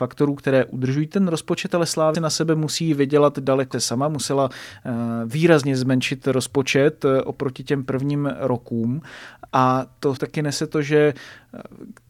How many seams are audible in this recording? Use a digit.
4